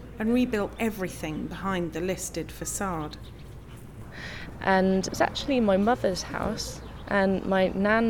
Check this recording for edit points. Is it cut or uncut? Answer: uncut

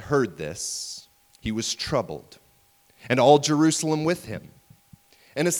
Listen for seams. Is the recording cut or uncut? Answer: uncut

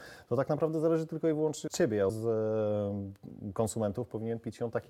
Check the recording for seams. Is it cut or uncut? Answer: cut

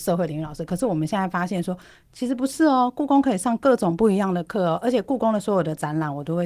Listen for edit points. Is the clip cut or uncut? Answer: uncut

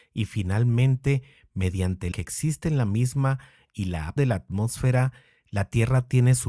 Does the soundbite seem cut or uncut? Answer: cut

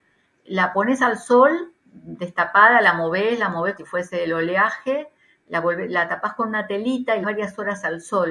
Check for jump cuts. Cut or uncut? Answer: cut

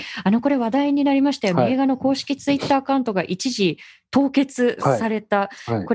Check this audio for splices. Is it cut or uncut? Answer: uncut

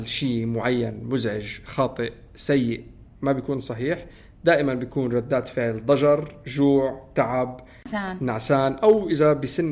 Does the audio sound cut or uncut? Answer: uncut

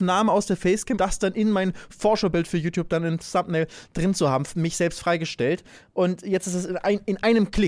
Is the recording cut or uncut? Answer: cut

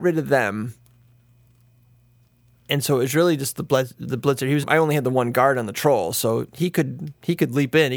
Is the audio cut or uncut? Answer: cut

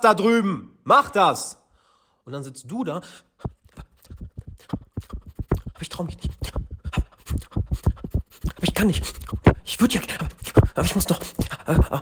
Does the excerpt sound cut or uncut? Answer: uncut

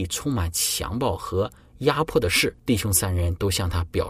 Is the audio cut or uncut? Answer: cut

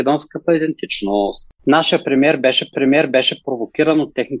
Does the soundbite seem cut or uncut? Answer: cut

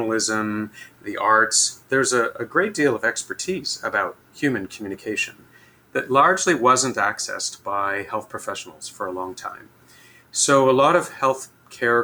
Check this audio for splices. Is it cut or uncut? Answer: uncut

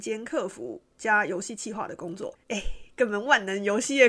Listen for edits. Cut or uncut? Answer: cut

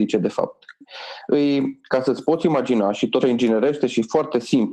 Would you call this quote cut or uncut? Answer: cut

